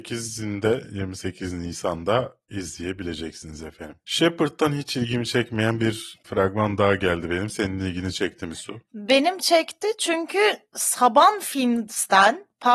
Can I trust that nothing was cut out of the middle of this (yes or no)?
yes